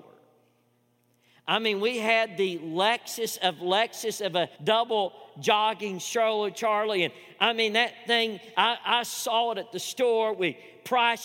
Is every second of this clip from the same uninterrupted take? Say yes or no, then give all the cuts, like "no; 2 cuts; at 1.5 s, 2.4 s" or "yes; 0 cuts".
no; 1 cut; at 4.5 s